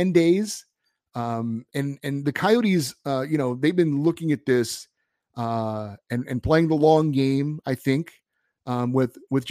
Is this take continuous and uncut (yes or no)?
yes